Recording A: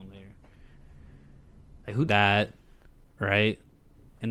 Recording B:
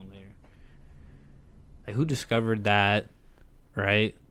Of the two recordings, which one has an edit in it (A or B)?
A